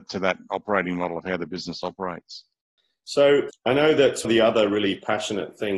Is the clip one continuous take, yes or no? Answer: no